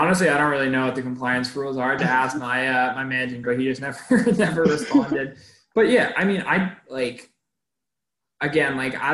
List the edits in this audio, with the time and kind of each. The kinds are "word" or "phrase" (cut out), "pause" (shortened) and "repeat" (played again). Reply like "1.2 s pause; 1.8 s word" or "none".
2.0 s word; 3.4 s word